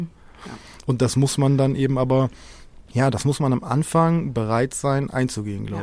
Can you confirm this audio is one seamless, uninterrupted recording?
no; 1 cut; at 2.9 s

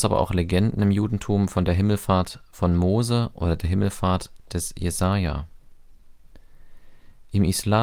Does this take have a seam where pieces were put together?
no; 0 cuts

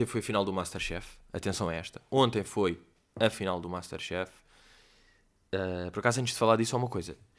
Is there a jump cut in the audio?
no; 0 cuts

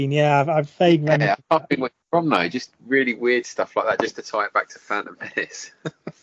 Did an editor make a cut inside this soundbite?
no; 0 cuts

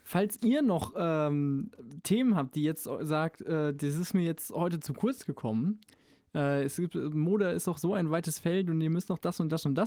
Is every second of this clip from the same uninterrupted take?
yes; 0 cuts

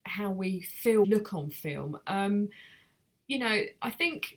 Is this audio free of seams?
no; 1 cut; at 1.0 s

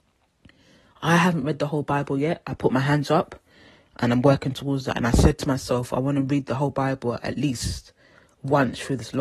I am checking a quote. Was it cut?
no; 0 cuts

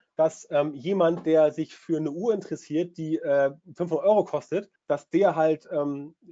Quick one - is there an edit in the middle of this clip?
yes; 1 cut; at 4.8 s

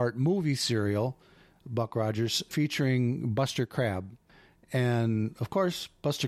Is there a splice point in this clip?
no; 0 cuts

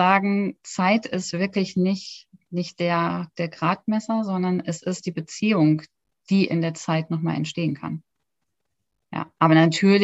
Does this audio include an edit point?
no; 0 cuts

